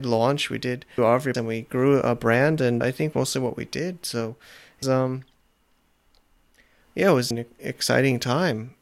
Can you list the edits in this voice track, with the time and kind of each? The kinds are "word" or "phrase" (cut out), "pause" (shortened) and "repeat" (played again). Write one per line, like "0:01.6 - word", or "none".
0:01.0 - word
0:01.3 - phrase
0:02.8 - word
0:03.1 - phrase
0:04.8 - word
0:07.3 - word